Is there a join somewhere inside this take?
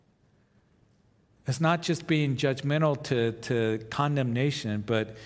no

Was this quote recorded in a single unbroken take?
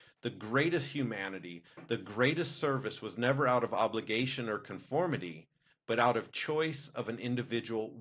yes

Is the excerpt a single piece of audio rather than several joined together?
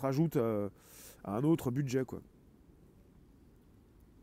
yes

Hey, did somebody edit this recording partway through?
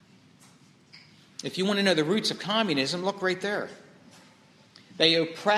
no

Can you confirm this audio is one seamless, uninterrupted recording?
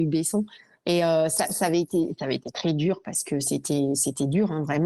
yes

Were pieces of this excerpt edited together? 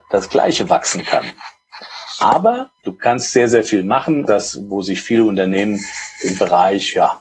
yes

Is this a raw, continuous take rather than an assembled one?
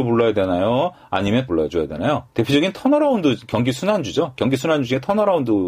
no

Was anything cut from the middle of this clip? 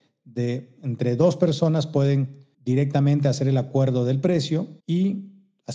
yes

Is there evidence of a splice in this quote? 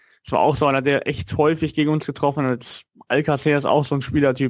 no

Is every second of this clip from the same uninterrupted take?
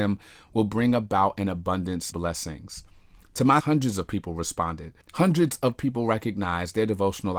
no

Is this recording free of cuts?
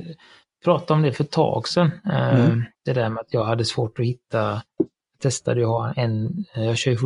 no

